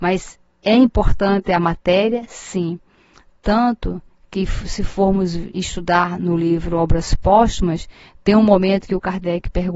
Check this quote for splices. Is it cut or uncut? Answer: uncut